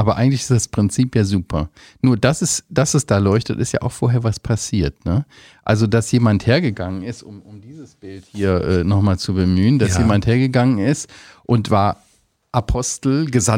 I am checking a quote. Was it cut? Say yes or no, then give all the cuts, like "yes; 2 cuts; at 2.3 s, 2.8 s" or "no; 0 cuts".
no; 0 cuts